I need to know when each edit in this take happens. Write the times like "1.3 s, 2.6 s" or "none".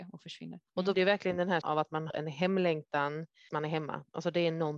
0.9 s, 1.6 s, 2.1 s, 3.5 s